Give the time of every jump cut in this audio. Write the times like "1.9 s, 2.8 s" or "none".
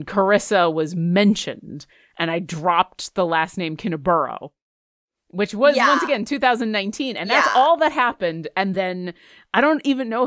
none